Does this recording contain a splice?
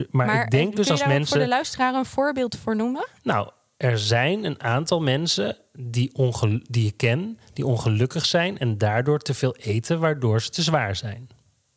no; 0 cuts

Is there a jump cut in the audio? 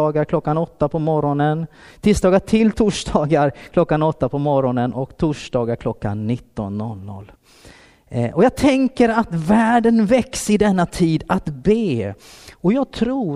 no; 0 cuts

